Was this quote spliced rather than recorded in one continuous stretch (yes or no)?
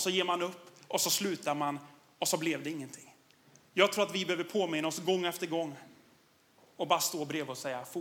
no